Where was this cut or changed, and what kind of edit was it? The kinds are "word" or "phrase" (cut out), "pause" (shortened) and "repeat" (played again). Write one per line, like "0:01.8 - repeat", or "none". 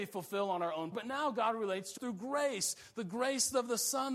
0:00.9 - word
0:02.0 - word